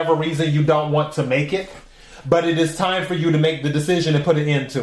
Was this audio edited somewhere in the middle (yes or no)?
no